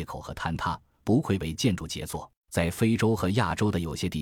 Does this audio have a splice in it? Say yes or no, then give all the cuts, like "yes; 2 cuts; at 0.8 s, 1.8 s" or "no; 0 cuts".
yes; 1 cut; at 2.4 s